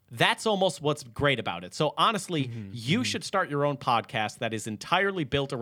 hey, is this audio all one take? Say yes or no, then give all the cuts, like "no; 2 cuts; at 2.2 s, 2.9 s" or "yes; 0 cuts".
yes; 0 cuts